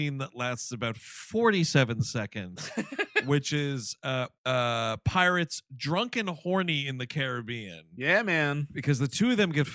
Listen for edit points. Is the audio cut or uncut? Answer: cut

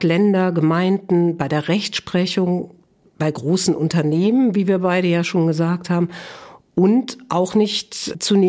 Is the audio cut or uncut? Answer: uncut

